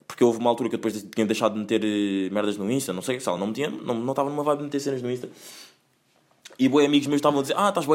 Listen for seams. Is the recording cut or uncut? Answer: uncut